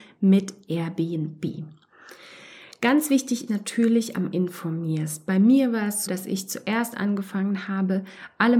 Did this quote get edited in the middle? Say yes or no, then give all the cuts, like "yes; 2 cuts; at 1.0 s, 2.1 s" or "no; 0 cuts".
yes; 3 cuts; at 3.5 s, 4.3 s, 6.1 s